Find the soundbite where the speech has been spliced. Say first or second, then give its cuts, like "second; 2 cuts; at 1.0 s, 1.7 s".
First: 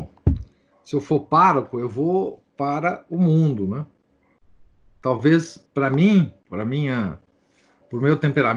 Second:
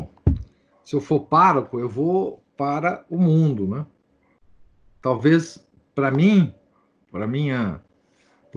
first; 2 cuts; at 5.7 s, 6.4 s